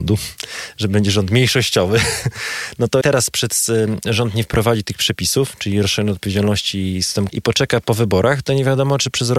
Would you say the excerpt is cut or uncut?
cut